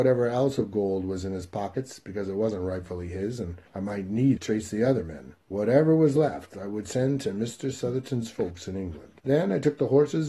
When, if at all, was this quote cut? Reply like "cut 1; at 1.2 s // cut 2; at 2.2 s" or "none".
cut 1; at 3.7 s // cut 2; at 4.4 s // cut 3; at 5.4 s // cut 4; at 9.2 s